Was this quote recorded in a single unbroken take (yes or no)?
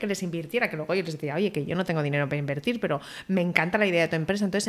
yes